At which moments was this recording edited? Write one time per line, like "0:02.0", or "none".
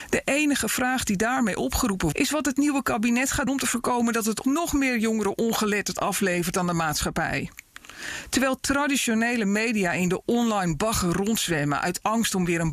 0:02.1
0:03.5
0:04.4